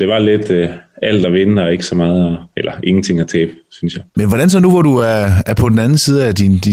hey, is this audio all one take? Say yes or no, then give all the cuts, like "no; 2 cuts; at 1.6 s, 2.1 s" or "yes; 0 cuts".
yes; 0 cuts